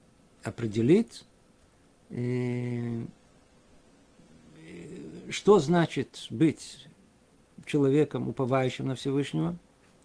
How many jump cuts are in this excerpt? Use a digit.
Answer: 0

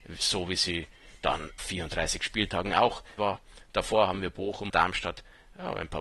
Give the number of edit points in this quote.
3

